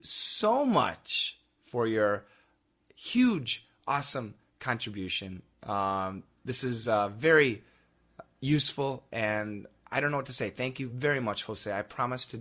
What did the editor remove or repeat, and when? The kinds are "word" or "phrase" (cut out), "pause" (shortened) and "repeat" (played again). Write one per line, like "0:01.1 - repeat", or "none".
none

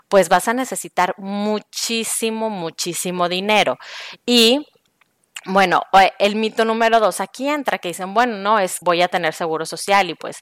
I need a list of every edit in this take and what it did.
0:08.8 - phrase

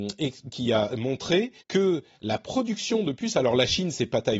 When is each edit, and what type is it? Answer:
0:01.6 - pause

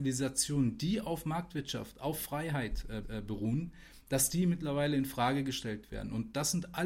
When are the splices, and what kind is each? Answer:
0:03.0 - repeat

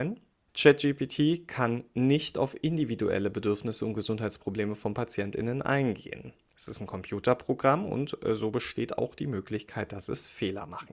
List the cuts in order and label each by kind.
none

